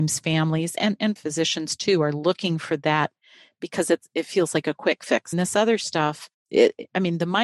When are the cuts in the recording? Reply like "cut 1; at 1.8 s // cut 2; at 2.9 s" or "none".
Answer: cut 1; at 1.2 s // cut 2; at 5.3 s